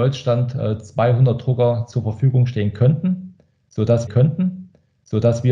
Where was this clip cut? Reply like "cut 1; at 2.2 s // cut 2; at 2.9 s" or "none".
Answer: cut 1; at 4.1 s